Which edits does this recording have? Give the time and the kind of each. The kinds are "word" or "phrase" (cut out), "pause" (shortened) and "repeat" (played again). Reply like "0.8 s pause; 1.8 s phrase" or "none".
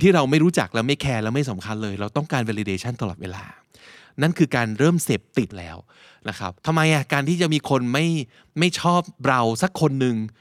5.5 s word; 6.6 s pause; 9.2 s pause